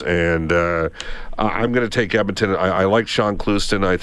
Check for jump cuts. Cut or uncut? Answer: uncut